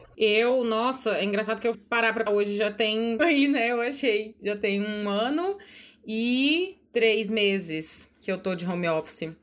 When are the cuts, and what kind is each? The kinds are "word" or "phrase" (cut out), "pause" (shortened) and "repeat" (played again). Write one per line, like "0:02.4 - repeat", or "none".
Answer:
0:01.7 - word
0:02.3 - word
0:03.2 - word
0:06.9 - pause
0:08.1 - pause